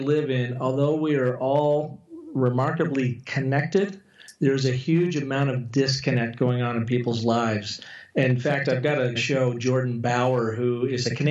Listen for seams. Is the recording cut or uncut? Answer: cut